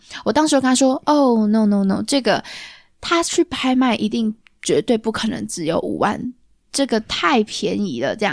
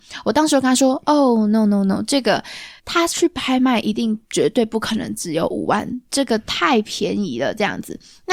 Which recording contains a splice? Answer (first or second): second